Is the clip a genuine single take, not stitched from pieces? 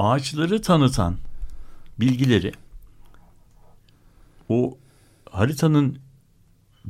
yes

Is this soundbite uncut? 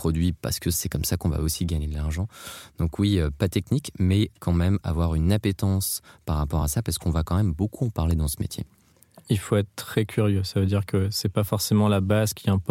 yes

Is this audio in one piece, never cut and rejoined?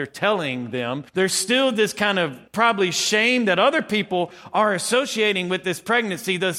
no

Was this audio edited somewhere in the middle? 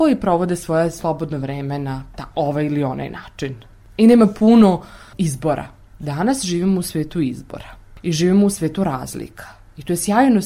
no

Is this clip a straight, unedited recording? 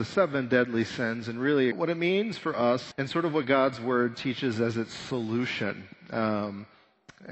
no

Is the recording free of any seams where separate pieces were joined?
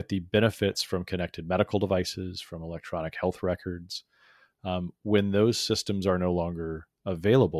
yes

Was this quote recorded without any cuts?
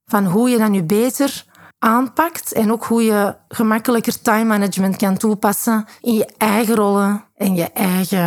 yes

